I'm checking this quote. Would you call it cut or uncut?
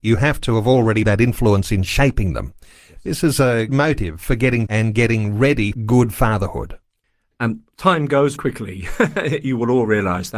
cut